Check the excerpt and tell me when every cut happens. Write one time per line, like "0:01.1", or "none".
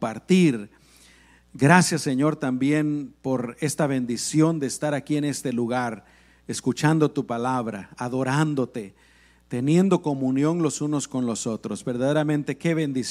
none